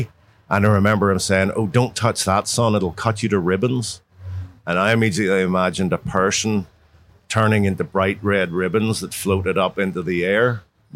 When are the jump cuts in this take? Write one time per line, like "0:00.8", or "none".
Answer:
none